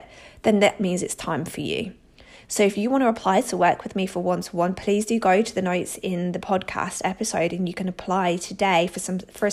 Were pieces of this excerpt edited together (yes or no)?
no